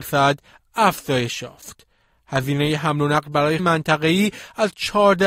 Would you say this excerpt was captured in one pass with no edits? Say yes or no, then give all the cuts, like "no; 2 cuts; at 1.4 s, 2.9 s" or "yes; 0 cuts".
no; 1 cut; at 3.6 s